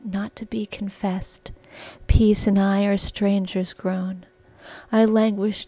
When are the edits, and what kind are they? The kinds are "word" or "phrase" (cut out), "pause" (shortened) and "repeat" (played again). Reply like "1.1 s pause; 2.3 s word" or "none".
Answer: none